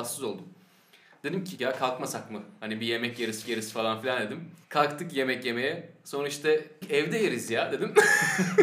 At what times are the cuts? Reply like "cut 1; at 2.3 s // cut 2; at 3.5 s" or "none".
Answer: cut 1; at 1.6 s // cut 2; at 3.4 s // cut 3; at 4.6 s // cut 4; at 6.8 s